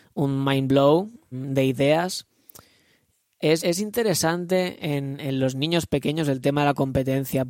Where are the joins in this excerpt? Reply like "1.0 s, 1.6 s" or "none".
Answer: 1.3 s, 3.6 s